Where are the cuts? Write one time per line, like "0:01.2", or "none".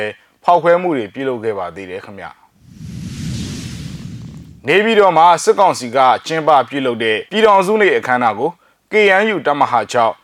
0:07.3

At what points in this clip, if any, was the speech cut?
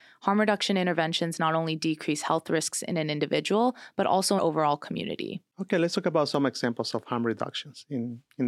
0:04.4

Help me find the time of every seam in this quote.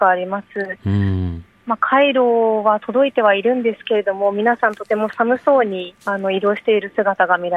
0:06.0

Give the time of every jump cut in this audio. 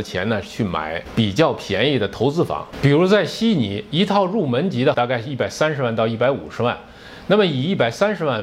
0:04.9

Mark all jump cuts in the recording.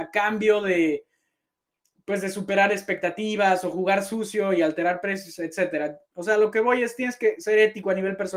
0:06.0

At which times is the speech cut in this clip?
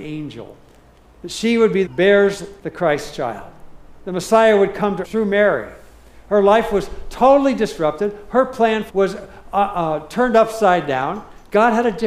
0:01.9
0:02.6
0:05.0
0:08.9

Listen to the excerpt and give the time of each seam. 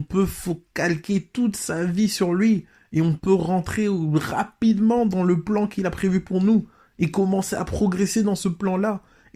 none

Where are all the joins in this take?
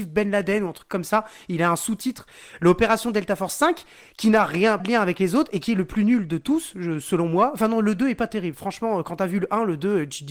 0:04.8

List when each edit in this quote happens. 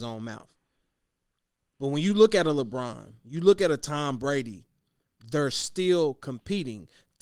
none

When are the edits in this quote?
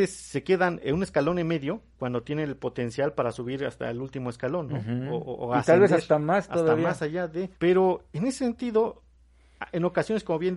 0:07.5

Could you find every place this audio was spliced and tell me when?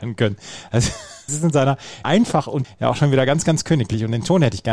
0:01.3
0:02.0
0:02.6

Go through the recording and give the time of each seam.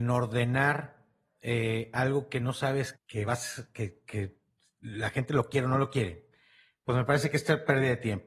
0:02.9

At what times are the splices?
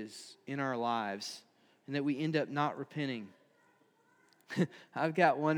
none

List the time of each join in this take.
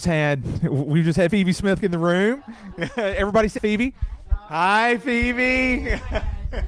0:01.3
0:01.8
0:03.6

